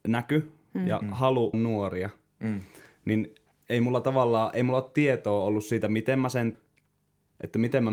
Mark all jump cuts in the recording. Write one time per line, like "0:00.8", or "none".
0:01.5
0:03.5
0:06.5